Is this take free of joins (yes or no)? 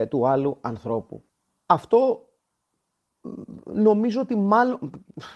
yes